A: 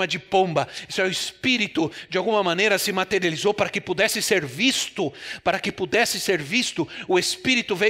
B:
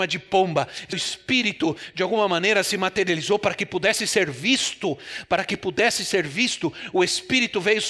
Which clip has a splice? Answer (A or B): B